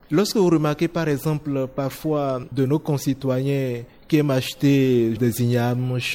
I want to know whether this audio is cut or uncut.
uncut